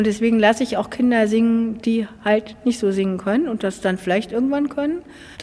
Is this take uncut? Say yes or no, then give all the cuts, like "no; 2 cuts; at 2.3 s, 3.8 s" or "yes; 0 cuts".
yes; 0 cuts